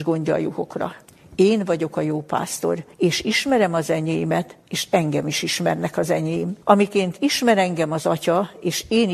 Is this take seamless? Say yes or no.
no